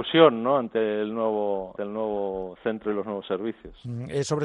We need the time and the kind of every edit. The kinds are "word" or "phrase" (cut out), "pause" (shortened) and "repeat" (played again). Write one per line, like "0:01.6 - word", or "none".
0:01.8 - word